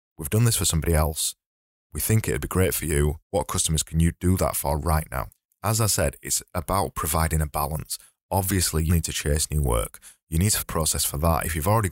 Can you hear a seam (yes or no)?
yes